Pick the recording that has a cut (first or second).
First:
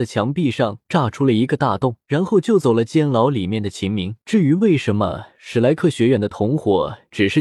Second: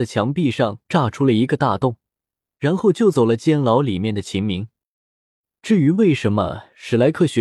first